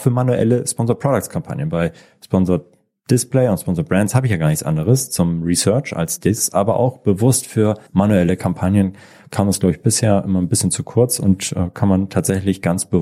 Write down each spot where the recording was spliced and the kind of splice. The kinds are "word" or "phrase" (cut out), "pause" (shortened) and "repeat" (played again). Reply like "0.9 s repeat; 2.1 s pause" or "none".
7.9 s pause